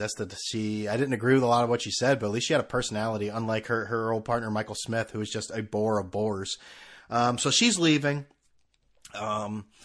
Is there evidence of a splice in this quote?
no; 0 cuts

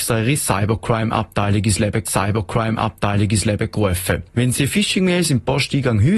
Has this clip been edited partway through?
yes; 2 cuts; at 2.0 s, 4.5 s

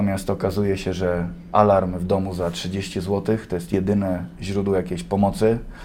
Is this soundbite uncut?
yes; 0 cuts

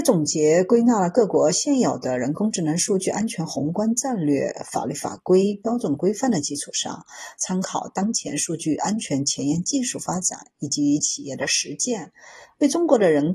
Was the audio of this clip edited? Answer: no; 0 cuts

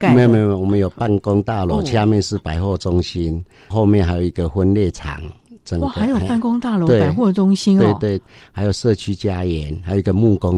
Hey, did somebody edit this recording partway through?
no; 0 cuts

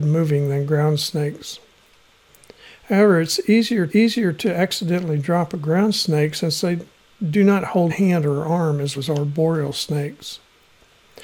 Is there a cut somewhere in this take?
yes; 3 cuts; at 3.9 s, 7.9 s, 9.0 s

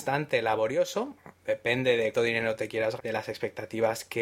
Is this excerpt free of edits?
no; 2 cuts; at 2.1 s, 3.0 s

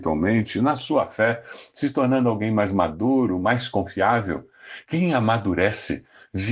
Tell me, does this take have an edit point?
no; 0 cuts

